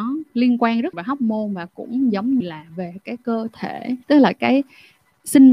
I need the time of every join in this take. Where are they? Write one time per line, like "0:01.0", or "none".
0:00.9
0:02.4
0:04.0